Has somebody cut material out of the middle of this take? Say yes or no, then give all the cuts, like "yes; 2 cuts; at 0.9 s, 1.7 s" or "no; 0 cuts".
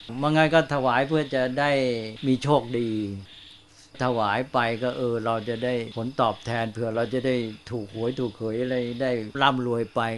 no; 0 cuts